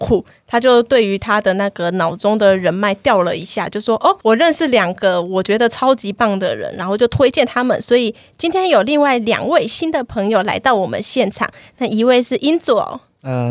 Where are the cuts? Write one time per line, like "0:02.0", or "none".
0:04.2